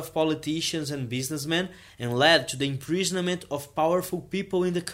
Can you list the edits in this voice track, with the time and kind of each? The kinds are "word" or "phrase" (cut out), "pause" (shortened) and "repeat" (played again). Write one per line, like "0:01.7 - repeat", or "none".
none